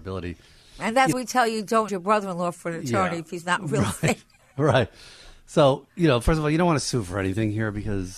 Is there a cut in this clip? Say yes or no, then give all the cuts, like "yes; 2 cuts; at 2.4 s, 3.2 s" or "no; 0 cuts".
yes; 3 cuts; at 1.1 s, 1.9 s, 5.9 s